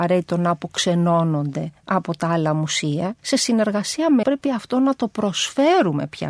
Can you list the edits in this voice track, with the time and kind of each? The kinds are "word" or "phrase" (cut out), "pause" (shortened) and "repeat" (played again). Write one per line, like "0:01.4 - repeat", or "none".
0:03.2 - pause
0:04.2 - word